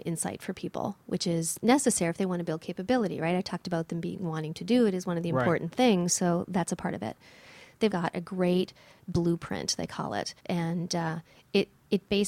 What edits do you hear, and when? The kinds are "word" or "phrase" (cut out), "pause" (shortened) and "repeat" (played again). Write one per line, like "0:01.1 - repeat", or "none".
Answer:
0:07.9 - word
0:10.4 - pause